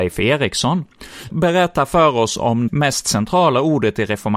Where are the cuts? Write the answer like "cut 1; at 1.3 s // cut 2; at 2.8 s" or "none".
cut 1; at 1.3 s // cut 2; at 2.7 s